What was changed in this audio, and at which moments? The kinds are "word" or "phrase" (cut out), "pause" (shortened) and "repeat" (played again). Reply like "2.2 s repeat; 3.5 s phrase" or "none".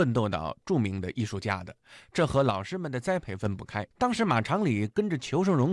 3.9 s pause